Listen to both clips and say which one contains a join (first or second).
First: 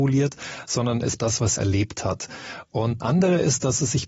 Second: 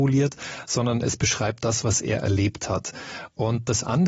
first